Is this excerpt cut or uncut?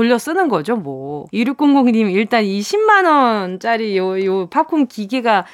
cut